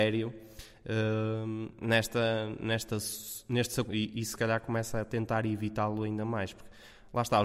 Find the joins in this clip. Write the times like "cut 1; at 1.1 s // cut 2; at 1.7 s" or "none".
cut 1; at 3.9 s